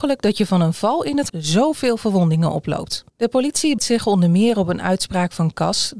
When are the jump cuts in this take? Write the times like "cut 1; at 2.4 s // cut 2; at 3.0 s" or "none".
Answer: cut 1; at 1.3 s // cut 2; at 3.1 s // cut 3; at 3.8 s